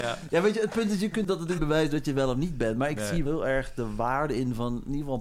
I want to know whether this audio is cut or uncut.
cut